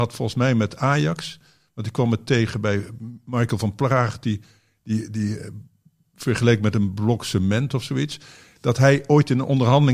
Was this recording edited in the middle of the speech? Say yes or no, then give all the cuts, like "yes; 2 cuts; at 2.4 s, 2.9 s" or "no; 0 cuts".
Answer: no; 0 cuts